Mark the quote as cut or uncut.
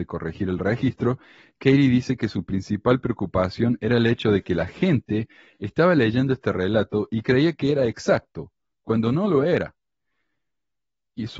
uncut